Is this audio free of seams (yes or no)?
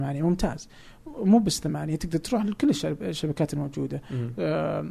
yes